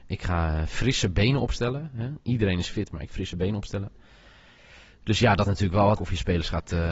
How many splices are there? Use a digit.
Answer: 3